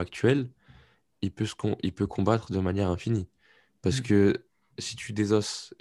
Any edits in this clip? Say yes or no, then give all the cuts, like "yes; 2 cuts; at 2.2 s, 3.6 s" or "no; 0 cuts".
no; 0 cuts